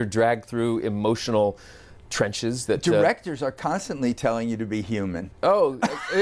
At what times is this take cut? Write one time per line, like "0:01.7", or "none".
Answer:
none